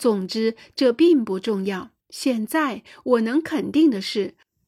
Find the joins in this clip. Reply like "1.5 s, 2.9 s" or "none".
2.0 s